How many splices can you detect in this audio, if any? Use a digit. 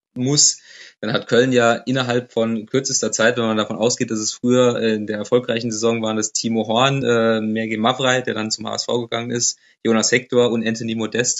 0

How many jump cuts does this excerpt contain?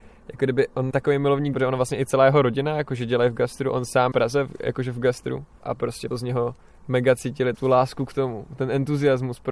5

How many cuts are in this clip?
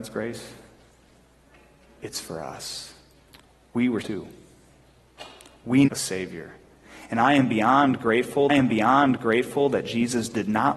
4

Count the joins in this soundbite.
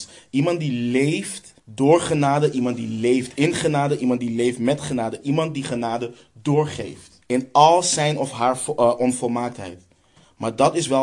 2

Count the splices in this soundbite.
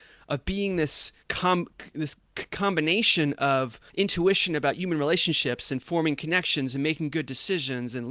2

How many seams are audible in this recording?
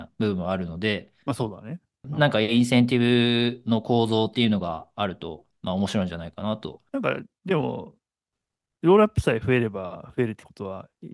2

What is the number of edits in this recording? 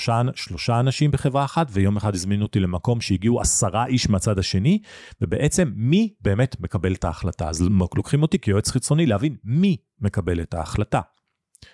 0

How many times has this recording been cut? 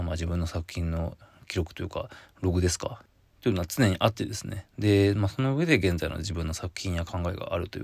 0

